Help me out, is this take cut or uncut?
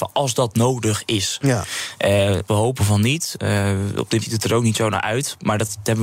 cut